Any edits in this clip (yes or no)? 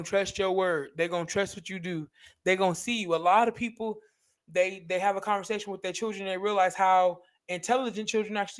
no